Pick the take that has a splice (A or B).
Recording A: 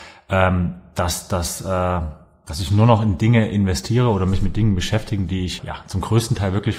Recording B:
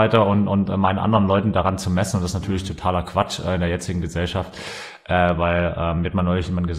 A